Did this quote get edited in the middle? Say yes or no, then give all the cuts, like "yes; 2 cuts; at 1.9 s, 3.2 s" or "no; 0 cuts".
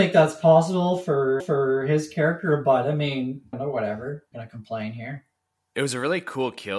yes; 3 cuts; at 1.4 s, 3.5 s, 4.3 s